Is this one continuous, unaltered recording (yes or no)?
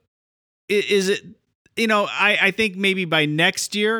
yes